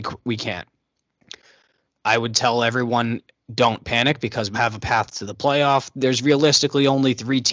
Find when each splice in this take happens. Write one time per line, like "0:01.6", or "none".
0:04.5